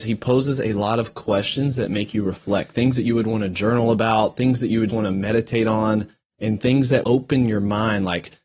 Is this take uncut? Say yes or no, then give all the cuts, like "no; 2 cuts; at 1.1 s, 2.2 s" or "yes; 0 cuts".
no; 2 cuts; at 4.9 s, 7.0 s